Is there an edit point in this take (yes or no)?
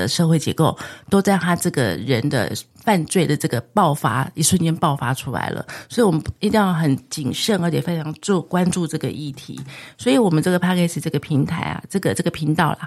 yes